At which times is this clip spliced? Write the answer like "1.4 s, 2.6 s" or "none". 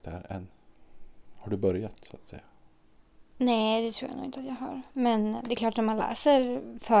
3.3 s